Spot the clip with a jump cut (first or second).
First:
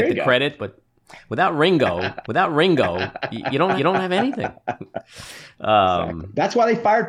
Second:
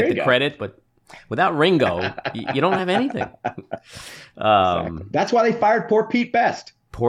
first